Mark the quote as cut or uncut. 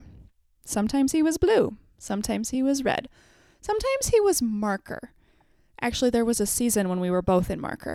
uncut